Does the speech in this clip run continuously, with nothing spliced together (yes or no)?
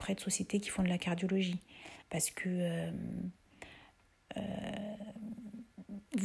no